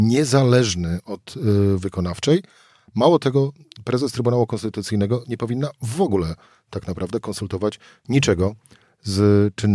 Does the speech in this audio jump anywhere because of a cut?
yes; 1 cut; at 1.8 s

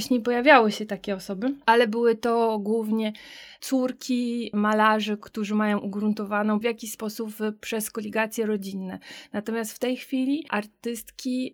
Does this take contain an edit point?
yes; 1 cut; at 6.6 s

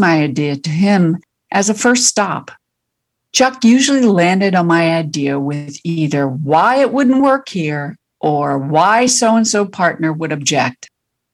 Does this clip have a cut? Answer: no; 0 cuts

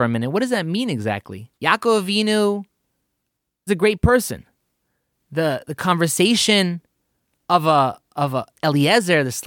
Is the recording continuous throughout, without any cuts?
no; 2 cuts; at 1.5 s, 3.7 s

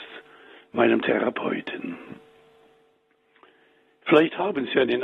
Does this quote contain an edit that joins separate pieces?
no; 0 cuts

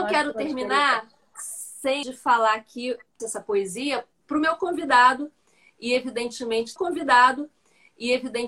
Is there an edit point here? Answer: yes; 3 cuts; at 2.0 s, 3.2 s, 6.8 s

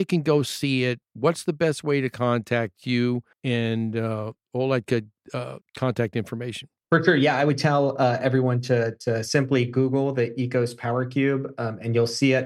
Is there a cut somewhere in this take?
yes; 4 cuts; at 1.0 s, 3.3 s, 5.6 s, 6.8 s

